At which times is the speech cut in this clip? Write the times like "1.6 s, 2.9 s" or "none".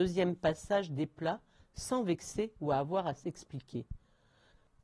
none